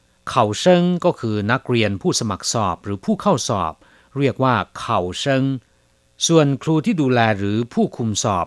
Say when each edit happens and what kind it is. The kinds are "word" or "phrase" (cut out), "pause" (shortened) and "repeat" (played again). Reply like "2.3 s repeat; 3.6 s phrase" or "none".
none